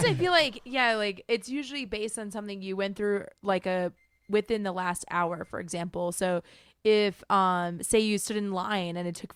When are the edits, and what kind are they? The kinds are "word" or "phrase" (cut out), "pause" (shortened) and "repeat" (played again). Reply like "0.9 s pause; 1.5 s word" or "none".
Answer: none